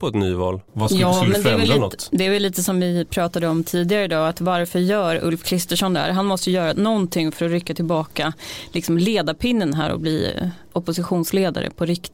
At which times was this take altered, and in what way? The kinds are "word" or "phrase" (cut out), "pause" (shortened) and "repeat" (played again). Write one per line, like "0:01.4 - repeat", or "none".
none